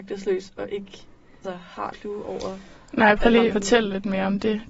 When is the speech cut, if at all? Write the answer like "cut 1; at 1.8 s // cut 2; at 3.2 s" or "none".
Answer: cut 1; at 1.4 s // cut 2; at 1.9 s // cut 3; at 3.5 s